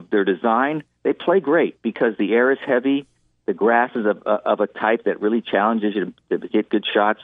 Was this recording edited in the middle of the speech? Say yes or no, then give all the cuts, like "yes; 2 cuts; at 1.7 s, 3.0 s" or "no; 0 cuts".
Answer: no; 0 cuts